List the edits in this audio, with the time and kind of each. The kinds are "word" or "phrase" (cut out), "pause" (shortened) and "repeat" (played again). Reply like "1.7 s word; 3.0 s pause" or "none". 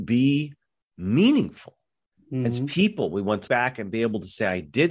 3.5 s word